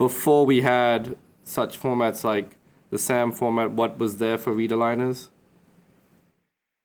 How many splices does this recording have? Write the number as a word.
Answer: zero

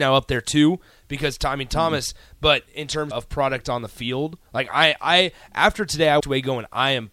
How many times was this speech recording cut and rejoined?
three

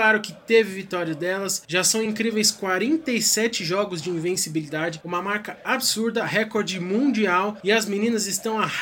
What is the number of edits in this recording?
zero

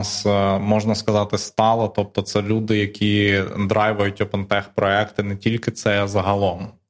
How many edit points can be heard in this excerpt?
zero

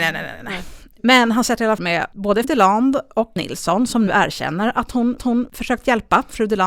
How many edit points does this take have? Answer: five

